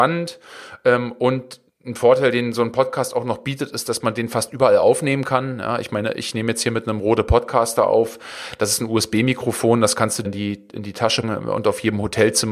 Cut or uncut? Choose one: cut